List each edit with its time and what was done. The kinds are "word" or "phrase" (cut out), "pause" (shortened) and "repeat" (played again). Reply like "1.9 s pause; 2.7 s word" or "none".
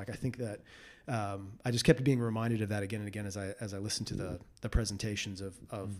none